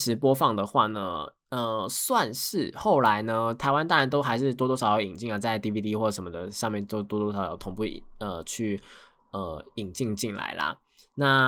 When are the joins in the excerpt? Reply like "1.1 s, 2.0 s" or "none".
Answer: none